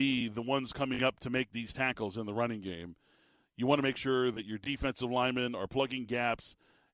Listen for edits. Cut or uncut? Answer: uncut